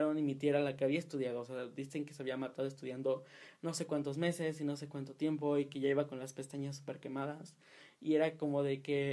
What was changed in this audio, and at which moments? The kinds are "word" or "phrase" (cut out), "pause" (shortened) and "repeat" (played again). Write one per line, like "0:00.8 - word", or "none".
none